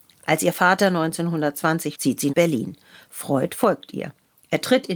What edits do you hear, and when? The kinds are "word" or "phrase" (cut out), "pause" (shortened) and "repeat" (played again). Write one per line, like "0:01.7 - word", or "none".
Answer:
0:01.9 - word
0:02.3 - word